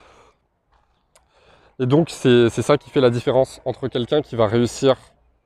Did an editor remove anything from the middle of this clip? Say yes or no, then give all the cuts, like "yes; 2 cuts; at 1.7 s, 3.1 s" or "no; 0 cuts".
no; 0 cuts